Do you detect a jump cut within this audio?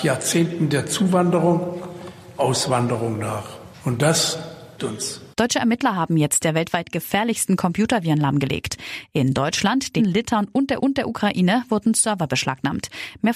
yes; 6 cuts; at 2.4 s, 4.8 s, 5.3 s, 6.4 s, 10.0 s, 10.8 s

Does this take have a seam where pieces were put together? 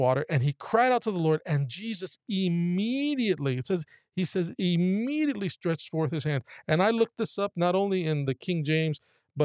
no; 0 cuts

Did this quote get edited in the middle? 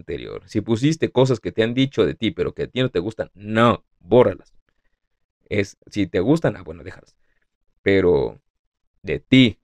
no; 0 cuts

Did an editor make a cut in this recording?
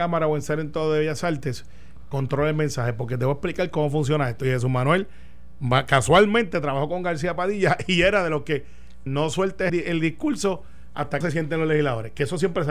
yes; 4 cuts; at 2.1 s, 9.1 s, 9.7 s, 11.2 s

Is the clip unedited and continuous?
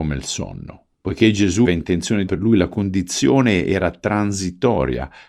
no; 3 cuts; at 0.9 s, 1.6 s, 2.3 s

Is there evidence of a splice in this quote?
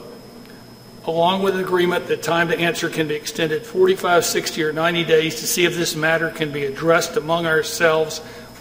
no; 0 cuts

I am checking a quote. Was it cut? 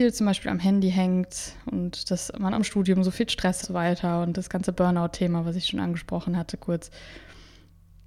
yes; 2 cuts; at 2.5 s, 3.6 s

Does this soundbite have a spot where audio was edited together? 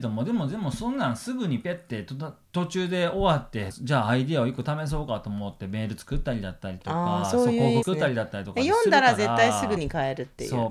yes; 3 cuts; at 3.7 s, 7.8 s, 9.8 s

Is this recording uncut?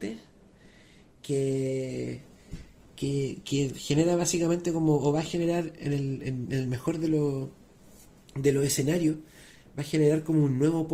yes; 0 cuts

